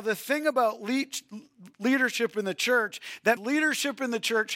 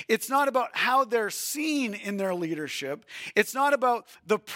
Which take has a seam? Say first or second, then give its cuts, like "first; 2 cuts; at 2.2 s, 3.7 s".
first; 1 cut; at 3.4 s